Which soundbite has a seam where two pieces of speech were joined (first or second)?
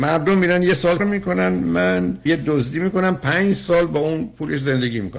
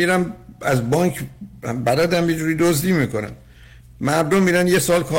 first